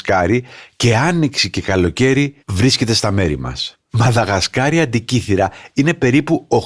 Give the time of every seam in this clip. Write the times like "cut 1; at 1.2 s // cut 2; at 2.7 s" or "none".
cut 1; at 2.4 s // cut 2; at 3.8 s

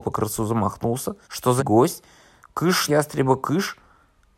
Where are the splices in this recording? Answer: cut 1; at 1.2 s // cut 2; at 1.6 s // cut 3; at 2.9 s

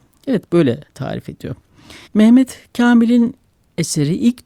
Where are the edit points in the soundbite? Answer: cut 1; at 2.0 s

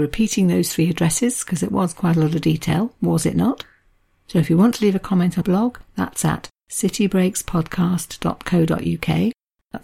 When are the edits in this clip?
cut 1; at 5.4 s

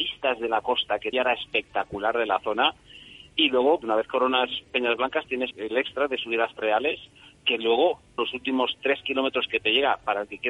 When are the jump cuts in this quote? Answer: cut 1; at 1.1 s // cut 2; at 3.8 s // cut 3; at 4.6 s // cut 4; at 5.5 s // cut 5; at 6.6 s // cut 6; at 8.2 s

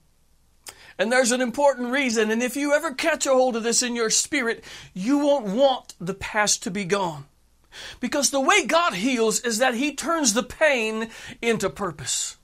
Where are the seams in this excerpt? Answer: none

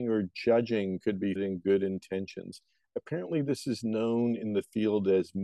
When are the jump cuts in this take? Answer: cut 1; at 1.4 s

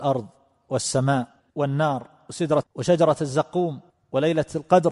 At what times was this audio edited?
cut 1; at 1.4 s // cut 2; at 2.6 s

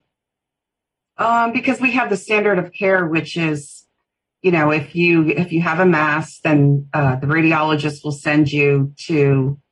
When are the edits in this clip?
none

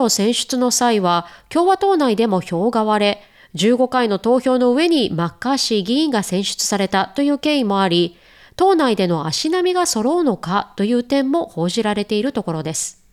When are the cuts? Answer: none

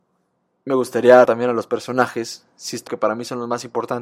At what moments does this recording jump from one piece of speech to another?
cut 1; at 1.2 s // cut 2; at 2.9 s

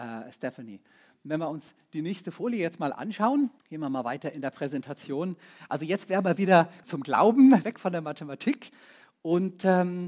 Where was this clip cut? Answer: cut 1; at 3.6 s // cut 2; at 6.8 s // cut 3; at 7.6 s

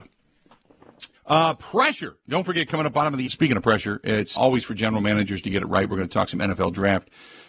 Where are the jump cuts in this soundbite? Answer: cut 1; at 1.2 s // cut 2; at 3.3 s // cut 3; at 4.4 s

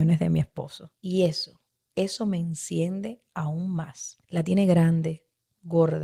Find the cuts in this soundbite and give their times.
cut 1; at 1.0 s // cut 2; at 1.7 s // cut 3; at 4.2 s

